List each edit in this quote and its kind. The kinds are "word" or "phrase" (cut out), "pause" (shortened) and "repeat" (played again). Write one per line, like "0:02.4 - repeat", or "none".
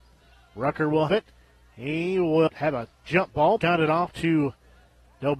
0:01.1 - word
0:02.5 - word
0:02.9 - pause
0:03.6 - word